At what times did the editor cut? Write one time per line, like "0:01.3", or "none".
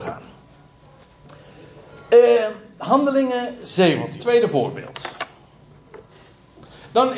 0:04.2